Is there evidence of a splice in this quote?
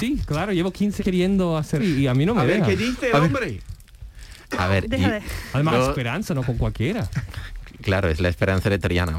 yes; 3 cuts; at 1.0 s, 1.8 s, 5.7 s

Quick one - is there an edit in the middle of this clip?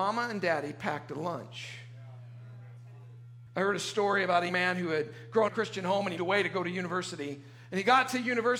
yes; 4 cuts; at 3.5 s, 4.5 s, 5.5 s, 6.2 s

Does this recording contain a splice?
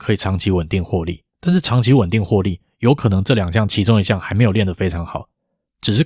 yes; 1 cut; at 1.3 s

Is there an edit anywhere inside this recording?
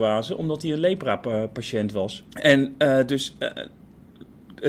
yes; 1 cut; at 2.3 s

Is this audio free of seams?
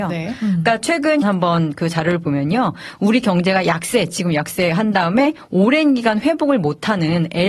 no; 1 cut; at 1.2 s

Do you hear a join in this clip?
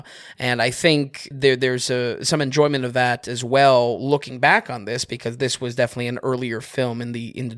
no; 0 cuts

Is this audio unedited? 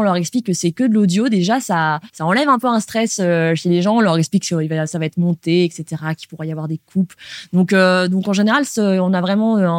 no; 1 cut; at 2.1 s

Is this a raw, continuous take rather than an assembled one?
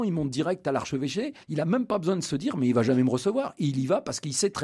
no; 1 cut; at 1.4 s

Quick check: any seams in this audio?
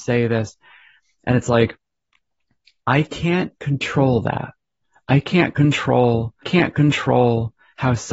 yes; 1 cut; at 6.4 s

